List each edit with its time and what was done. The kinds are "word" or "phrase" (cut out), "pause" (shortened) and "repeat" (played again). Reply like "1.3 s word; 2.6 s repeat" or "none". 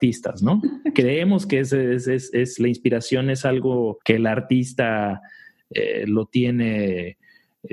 4.0 s pause